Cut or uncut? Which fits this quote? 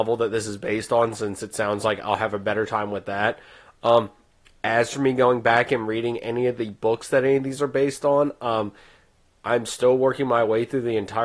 uncut